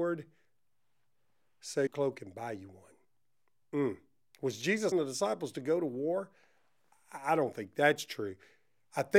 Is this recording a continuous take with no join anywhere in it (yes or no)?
no